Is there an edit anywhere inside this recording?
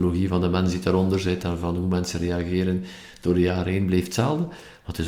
no; 0 cuts

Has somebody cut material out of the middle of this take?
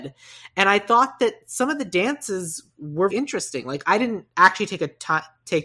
yes; 2 cuts; at 3.1 s, 4.3 s

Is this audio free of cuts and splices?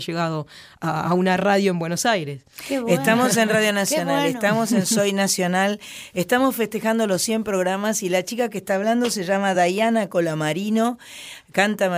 yes; 0 cuts

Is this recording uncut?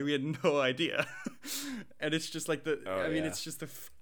yes; 0 cuts

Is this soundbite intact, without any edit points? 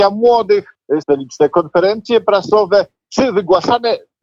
no; 1 cut; at 1.0 s

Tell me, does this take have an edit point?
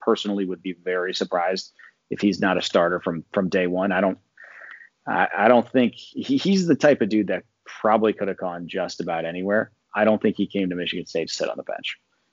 no; 0 cuts

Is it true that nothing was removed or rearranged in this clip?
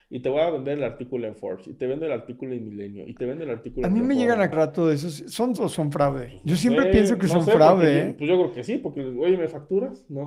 no; 2 cuts; at 4.5 s, 5.6 s

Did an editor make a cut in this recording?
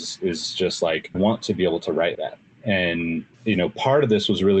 yes; 3 cuts; at 1.1 s, 2.1 s, 3.3 s

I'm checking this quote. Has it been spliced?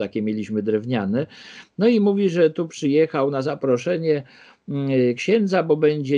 no; 0 cuts

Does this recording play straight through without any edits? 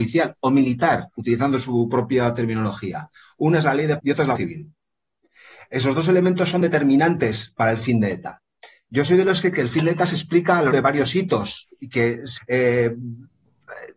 no; 6 cuts; at 4.0 s, 4.3 s, 7.6 s, 9.5 s, 10.7 s, 12.4 s

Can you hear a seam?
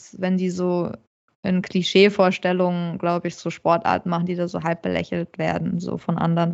no; 0 cuts

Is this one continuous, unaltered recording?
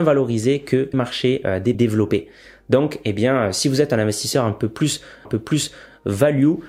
no; 3 cuts; at 0.9 s, 1.7 s, 5.2 s

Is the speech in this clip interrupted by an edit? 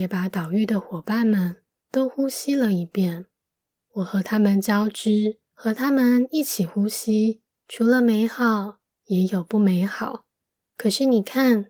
no; 0 cuts

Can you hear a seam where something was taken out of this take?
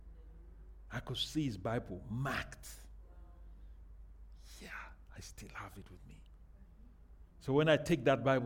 yes; 1 cut; at 7.3 s

